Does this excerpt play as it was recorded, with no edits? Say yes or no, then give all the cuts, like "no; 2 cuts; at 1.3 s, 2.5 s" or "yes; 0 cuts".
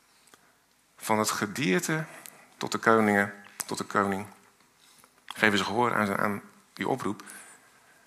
no; 1 cut; at 2.6 s